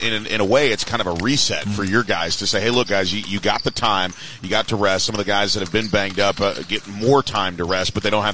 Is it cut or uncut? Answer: uncut